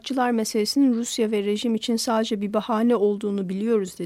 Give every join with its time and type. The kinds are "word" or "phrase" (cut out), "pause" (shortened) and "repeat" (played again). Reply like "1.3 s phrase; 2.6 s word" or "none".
none

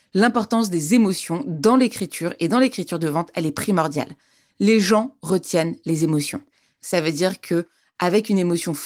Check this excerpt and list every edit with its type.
none

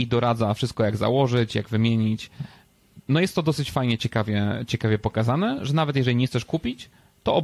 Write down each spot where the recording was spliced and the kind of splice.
3.0 s pause

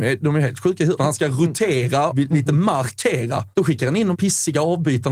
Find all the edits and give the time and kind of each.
1.0 s phrase; 2.1 s word; 3.5 s pause; 4.1 s word

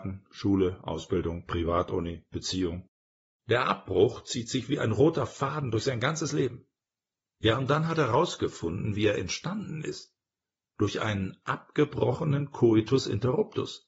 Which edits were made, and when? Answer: none

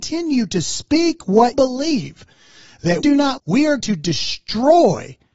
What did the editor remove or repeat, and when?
1.5 s word; 3.0 s word; 3.4 s word; 3.8 s word

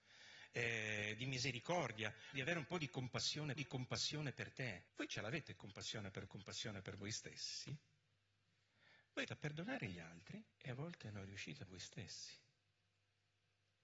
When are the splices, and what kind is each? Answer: 2.3 s word; 3.6 s repeat; 4.9 s pause; 6.3 s repeat; 9.3 s word; 10.5 s pause; 11.7 s word

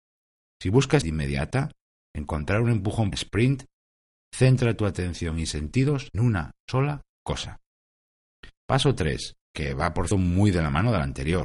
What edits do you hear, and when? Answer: 1.0 s word; 3.1 s phrase; 6.1 s word; 8.6 s pause; 9.4 s pause; 10.1 s word

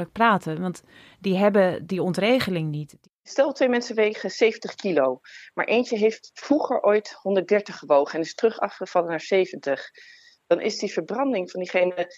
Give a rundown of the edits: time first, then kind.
none

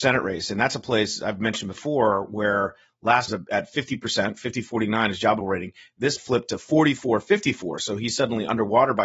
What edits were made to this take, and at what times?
3.3 s phrase; 5.4 s word; 6.2 s phrase

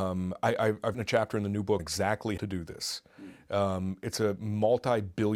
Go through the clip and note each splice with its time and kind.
0.9 s word; 1.8 s word; 2.4 s word

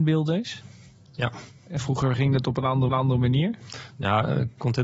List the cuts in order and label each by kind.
2.9 s repeat

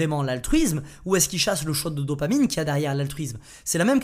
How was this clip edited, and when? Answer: none

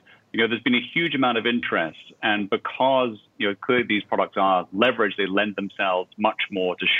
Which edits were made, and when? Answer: none

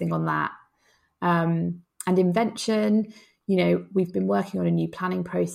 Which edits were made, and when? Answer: none

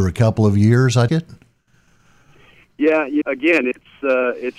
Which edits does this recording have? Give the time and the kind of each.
1.1 s word; 3.2 s word

